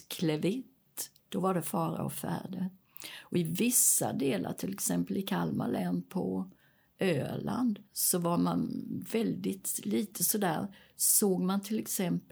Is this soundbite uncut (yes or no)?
no